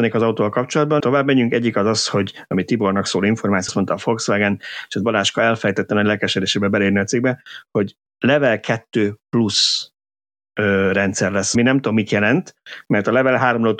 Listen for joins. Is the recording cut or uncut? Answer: cut